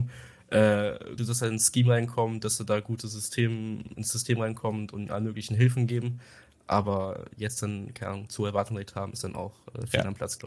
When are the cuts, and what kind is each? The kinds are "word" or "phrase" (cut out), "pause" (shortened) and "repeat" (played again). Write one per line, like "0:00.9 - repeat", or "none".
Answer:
0:01.2 - word